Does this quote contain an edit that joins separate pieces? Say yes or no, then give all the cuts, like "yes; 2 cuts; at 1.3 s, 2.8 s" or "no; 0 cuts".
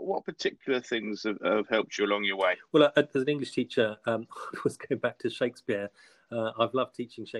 yes; 1 cut; at 3.1 s